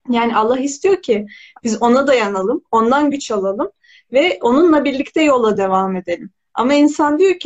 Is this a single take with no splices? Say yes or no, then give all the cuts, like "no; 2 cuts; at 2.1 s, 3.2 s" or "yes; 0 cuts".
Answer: yes; 0 cuts